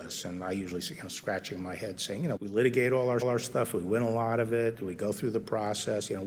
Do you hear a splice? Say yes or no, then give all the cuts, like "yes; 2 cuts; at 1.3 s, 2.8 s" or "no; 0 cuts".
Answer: yes; 2 cuts; at 2.4 s, 3.2 s